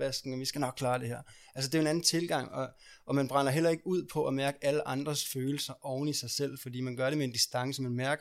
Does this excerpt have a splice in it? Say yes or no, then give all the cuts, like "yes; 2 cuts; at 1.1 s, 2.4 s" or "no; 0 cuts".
no; 0 cuts